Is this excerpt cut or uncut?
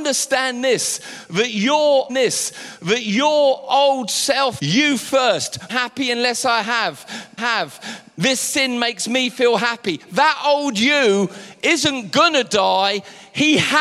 cut